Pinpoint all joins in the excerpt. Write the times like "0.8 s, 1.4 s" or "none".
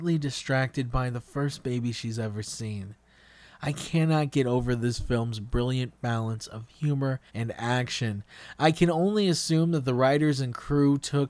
7.3 s